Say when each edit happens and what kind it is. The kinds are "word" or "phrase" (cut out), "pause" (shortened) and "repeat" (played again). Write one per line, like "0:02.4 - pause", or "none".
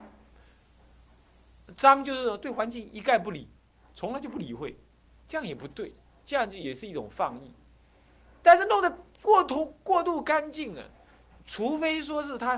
none